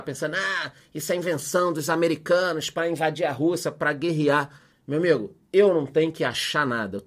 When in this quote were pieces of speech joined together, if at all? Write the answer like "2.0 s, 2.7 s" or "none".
none